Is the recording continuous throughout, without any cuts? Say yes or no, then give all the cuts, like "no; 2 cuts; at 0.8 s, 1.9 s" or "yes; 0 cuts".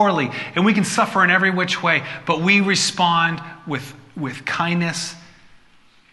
yes; 0 cuts